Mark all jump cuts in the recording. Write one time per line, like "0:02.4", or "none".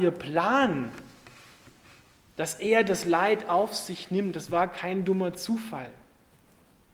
none

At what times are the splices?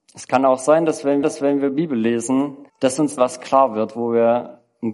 0:01.2
0:02.7
0:03.2

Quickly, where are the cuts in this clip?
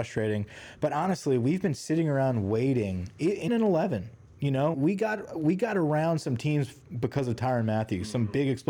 0:03.5
0:04.7

